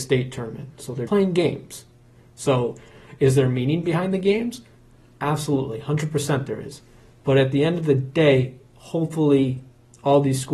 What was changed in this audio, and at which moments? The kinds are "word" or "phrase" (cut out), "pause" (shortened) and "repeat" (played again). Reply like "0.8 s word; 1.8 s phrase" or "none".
1.1 s word